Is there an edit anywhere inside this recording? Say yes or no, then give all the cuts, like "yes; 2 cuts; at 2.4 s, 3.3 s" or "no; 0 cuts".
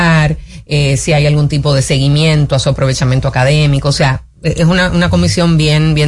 no; 0 cuts